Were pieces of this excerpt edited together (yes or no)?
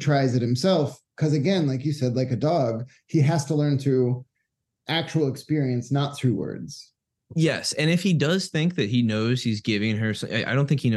no